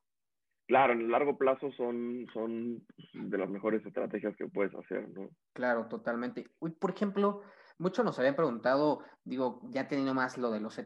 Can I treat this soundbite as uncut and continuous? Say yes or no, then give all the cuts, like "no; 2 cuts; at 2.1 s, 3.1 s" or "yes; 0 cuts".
yes; 0 cuts